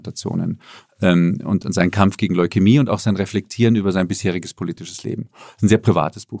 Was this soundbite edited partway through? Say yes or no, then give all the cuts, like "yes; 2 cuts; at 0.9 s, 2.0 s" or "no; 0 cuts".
no; 0 cuts